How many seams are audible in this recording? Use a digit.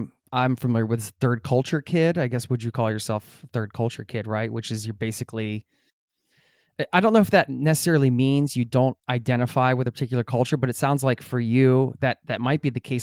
1